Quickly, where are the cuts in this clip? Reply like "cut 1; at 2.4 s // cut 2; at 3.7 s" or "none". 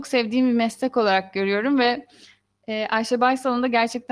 none